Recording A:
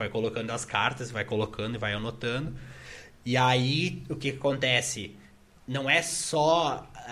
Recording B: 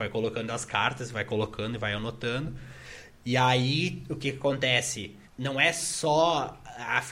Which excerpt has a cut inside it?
B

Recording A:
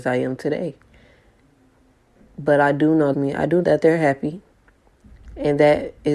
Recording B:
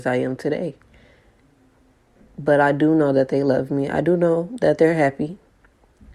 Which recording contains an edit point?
A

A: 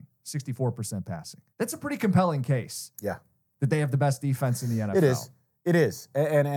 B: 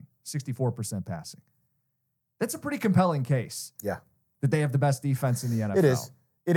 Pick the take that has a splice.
A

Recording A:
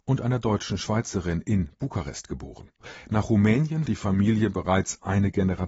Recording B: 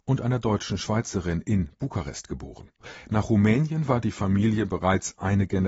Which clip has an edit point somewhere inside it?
A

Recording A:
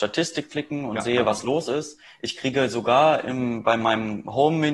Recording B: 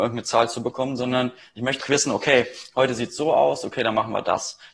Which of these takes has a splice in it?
B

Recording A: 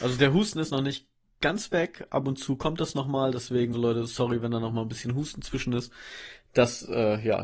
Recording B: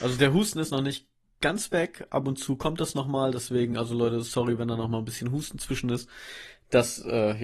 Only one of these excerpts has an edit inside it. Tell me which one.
A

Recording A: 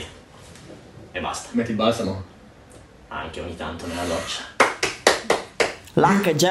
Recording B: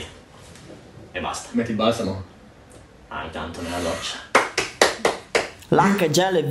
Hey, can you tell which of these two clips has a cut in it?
B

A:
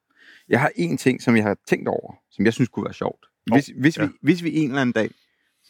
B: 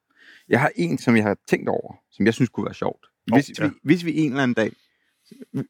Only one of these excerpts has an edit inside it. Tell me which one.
B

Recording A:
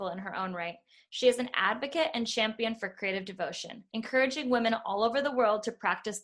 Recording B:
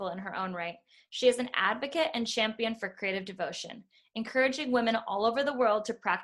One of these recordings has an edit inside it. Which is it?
A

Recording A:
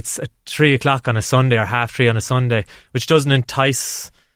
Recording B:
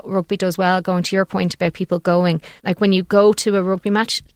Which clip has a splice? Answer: B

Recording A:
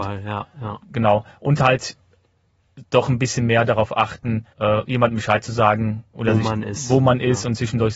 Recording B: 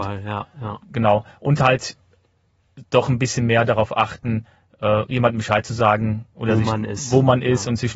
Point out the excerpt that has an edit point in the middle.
A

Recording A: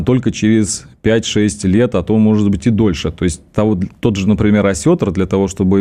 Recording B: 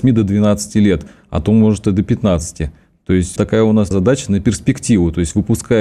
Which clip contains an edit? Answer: B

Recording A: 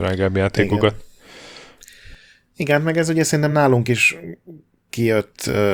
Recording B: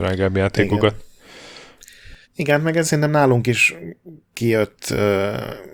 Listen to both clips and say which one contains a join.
B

